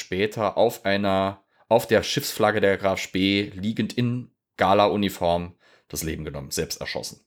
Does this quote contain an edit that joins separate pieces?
no; 0 cuts

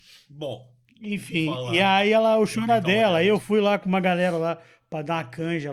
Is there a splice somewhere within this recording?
no; 0 cuts

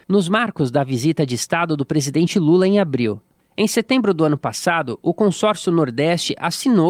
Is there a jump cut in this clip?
no; 0 cuts

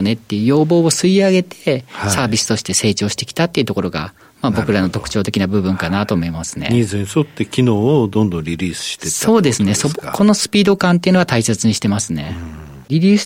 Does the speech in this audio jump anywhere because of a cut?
no; 0 cuts

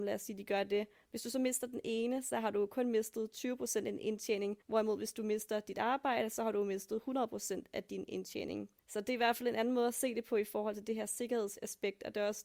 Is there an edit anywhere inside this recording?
yes; 2 cuts; at 4.6 s, 8.8 s

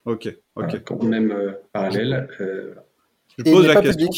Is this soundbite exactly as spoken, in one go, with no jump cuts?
no; 2 cuts; at 1.0 s, 1.7 s

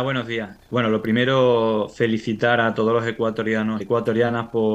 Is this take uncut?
no; 1 cut; at 3.8 s

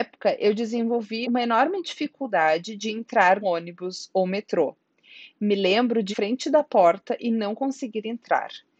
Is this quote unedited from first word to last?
no; 3 cuts; at 1.2 s, 3.4 s, 6.1 s

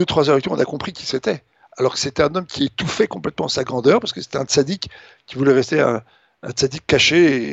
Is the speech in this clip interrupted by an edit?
no; 0 cuts

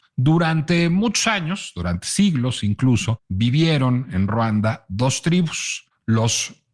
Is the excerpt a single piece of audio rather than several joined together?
yes; 0 cuts

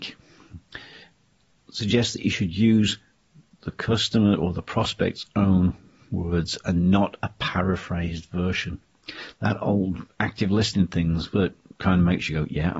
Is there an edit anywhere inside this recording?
no; 0 cuts

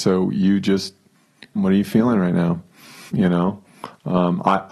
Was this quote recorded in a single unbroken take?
no; 2 cuts; at 1.6 s, 3.1 s

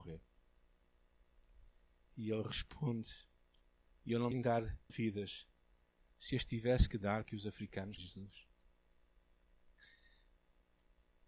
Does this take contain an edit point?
yes; 4 cuts; at 4.3 s, 4.9 s, 7.2 s, 8.0 s

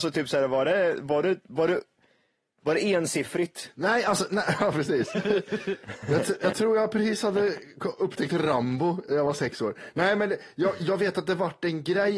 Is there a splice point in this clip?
no; 0 cuts

